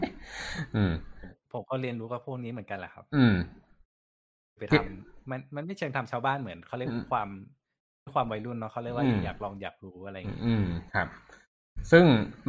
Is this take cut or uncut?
cut